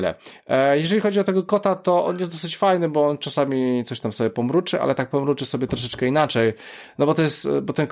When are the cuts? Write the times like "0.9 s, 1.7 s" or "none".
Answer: none